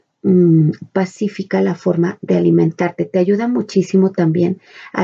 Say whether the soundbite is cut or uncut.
uncut